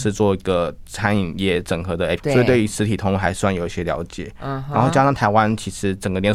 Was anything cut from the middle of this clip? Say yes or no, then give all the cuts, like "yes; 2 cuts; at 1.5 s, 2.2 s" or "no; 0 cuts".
yes; 1 cut; at 2.2 s